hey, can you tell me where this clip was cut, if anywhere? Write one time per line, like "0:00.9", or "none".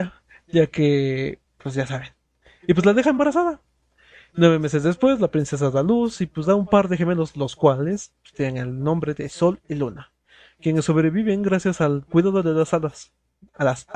none